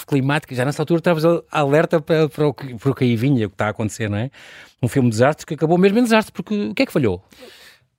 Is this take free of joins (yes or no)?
yes